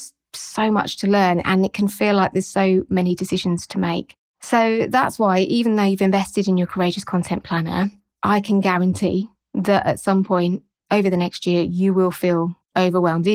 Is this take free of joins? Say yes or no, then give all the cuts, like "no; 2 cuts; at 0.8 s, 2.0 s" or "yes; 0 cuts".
yes; 0 cuts